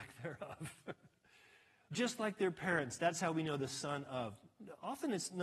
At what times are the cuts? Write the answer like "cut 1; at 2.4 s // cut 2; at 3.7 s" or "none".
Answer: cut 1; at 1.9 s // cut 2; at 3.6 s